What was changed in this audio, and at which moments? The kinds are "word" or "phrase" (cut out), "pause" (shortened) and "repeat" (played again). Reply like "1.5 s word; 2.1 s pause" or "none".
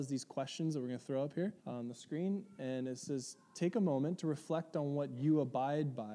1.6 s pause